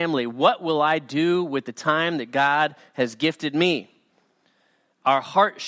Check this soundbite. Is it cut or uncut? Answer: uncut